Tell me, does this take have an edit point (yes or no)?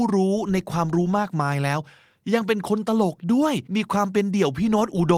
yes